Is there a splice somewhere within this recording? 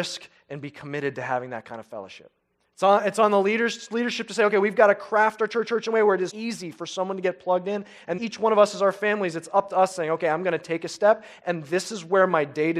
yes; 4 cuts; at 2.5 s, 5.6 s, 6.3 s, 8.2 s

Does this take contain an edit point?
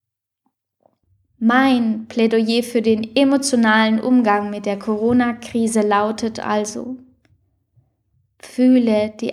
no; 0 cuts

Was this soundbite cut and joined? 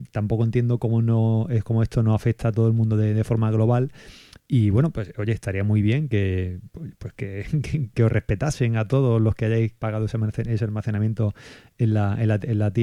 yes; 1 cut; at 7.9 s

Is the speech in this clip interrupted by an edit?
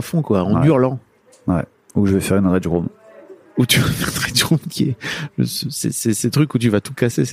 no; 0 cuts

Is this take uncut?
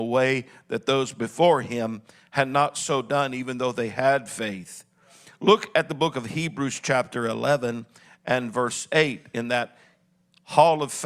yes; 0 cuts

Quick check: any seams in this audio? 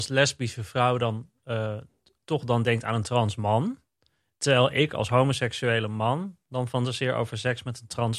no; 0 cuts

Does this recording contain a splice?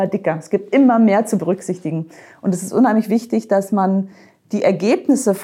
no; 0 cuts

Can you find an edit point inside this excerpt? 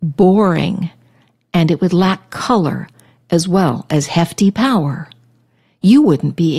no; 0 cuts

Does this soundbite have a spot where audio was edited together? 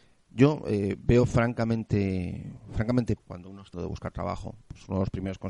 yes; 2 cuts; at 3.2 s, 3.7 s

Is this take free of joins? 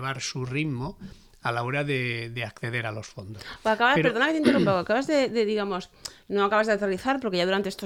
yes; 0 cuts

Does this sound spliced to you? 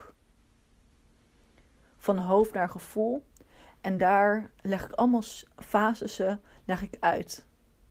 no; 0 cuts

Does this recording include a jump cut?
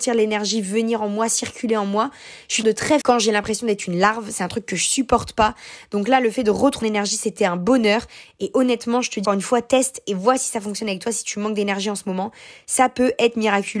yes; 4 cuts; at 2.6 s, 3.0 s, 6.8 s, 9.2 s

